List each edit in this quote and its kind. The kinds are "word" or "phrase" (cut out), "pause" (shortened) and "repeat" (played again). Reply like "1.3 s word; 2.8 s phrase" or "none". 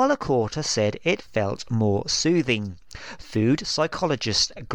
none